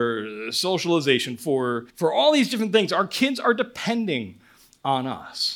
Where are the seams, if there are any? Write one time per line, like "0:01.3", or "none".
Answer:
0:01.9